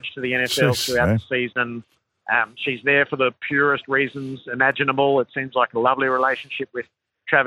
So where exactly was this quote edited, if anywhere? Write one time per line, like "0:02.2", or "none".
none

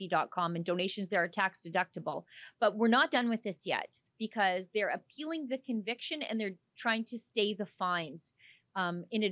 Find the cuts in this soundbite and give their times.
0:04.1

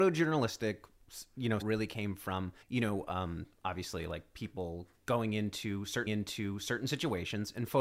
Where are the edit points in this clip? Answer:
0:01.6
0:02.6
0:06.1

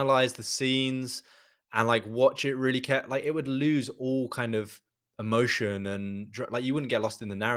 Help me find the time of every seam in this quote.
0:04.9

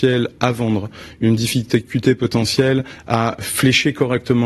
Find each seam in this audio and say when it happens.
none

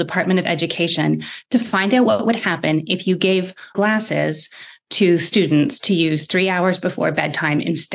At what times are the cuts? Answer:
0:03.7

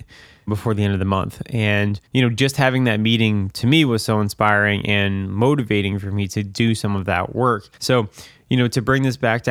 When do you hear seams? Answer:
0:02.0
0:07.7

